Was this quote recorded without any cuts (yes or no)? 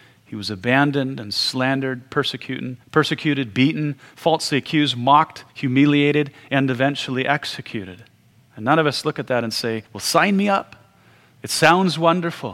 no